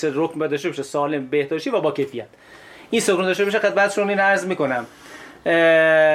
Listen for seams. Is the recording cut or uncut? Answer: uncut